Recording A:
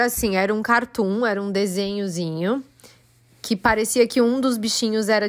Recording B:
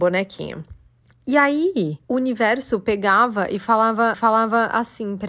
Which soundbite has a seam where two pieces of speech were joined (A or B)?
B